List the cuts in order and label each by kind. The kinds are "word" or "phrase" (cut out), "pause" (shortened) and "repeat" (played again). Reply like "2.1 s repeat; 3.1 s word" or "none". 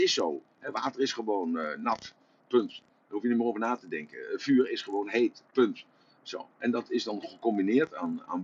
none